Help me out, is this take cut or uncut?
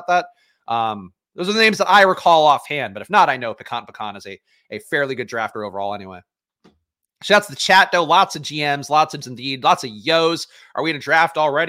cut